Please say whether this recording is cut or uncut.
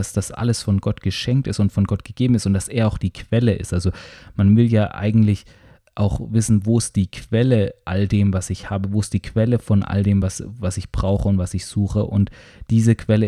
uncut